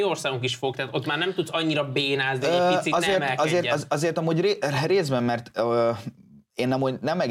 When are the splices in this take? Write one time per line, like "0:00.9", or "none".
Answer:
none